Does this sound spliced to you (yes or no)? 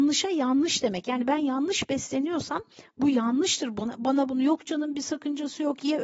no